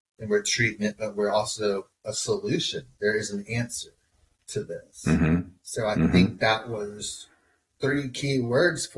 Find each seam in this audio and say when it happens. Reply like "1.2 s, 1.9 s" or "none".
none